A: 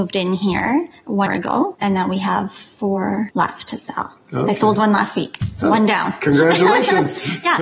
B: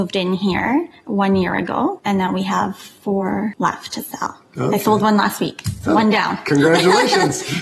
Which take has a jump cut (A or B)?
A